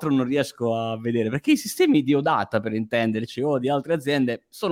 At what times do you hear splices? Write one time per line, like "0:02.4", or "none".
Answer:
none